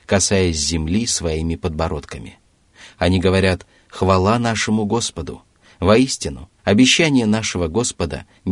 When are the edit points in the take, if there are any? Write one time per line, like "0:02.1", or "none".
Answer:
0:06.6